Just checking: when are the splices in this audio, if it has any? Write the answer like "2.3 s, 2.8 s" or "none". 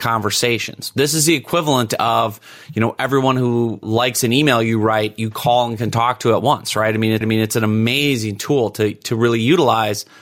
3.8 s, 7.2 s